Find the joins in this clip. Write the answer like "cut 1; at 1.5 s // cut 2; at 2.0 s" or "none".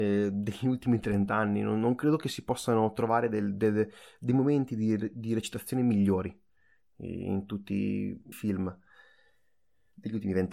cut 1; at 8.3 s